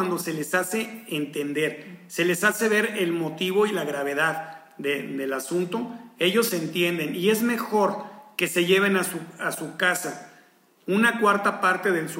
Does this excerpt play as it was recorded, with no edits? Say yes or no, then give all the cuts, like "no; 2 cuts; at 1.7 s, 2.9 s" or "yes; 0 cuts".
yes; 0 cuts